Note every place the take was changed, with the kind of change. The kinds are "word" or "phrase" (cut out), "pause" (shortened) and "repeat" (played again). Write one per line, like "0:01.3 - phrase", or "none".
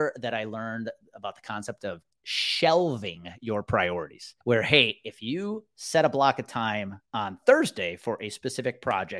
0:04.4 - pause
0:07.1 - pause